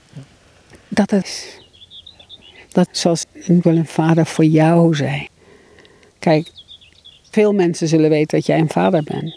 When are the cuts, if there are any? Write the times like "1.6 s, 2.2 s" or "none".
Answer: 1.2 s, 2.9 s, 3.2 s, 3.6 s